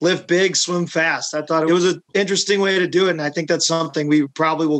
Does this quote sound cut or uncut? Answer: cut